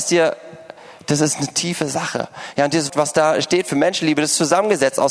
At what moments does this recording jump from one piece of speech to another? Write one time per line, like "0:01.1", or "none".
0:02.9